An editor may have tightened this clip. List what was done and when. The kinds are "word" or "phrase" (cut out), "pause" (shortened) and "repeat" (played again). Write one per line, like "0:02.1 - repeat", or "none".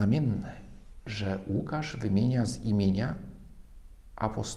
none